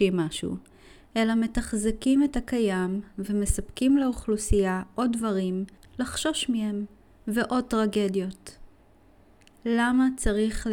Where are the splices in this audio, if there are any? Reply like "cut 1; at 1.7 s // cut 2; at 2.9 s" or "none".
none